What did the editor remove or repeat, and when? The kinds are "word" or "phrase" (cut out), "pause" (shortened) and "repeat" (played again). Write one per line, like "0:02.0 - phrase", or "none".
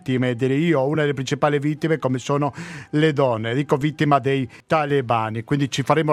none